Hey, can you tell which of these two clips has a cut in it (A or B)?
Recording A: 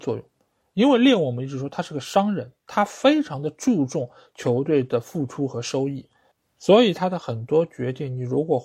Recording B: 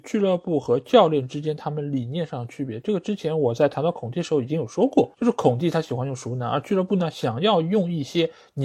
B